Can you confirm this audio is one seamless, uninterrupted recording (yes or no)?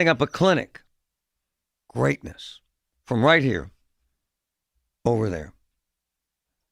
yes